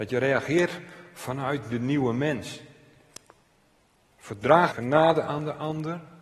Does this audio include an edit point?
yes; 1 cut; at 4.7 s

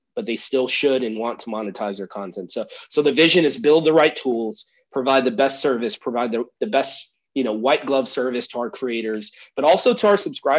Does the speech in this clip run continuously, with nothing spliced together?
yes; 0 cuts

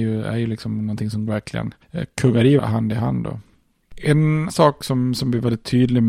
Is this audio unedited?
no; 3 cuts; at 1.3 s, 2.6 s, 4.5 s

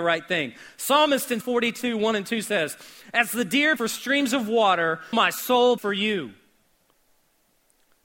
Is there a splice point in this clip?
yes; 4 cuts; at 1.4 s, 3.8 s, 5.1 s, 5.8 s

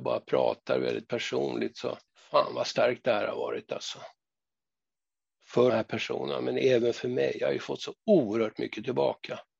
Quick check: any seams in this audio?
yes; 2 cuts; at 2.1 s, 5.7 s

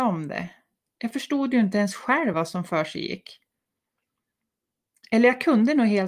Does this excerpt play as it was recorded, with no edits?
yes; 0 cuts

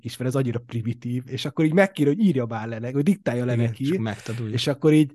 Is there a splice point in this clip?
no; 0 cuts

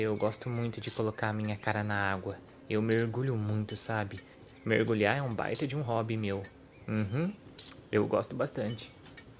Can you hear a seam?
no; 0 cuts

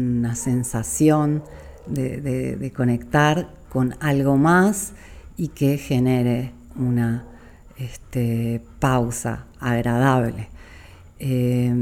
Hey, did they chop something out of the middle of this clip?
no; 0 cuts

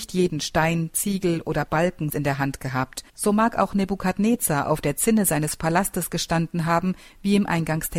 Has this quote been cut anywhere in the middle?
yes; 2 cuts; at 2.1 s, 3.1 s

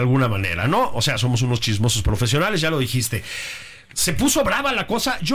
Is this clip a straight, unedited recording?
yes; 0 cuts

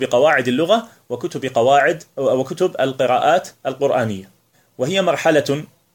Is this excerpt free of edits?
no; 1 cut; at 4.5 s

